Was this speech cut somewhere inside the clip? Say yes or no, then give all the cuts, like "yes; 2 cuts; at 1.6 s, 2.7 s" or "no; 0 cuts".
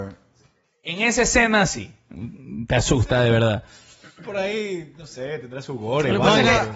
no; 0 cuts